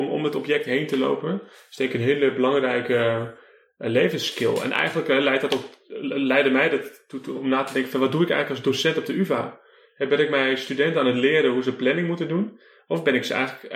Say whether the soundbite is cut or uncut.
uncut